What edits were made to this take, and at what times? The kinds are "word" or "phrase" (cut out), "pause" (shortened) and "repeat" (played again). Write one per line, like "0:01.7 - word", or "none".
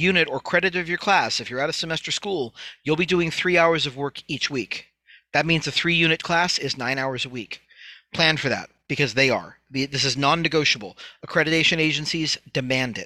none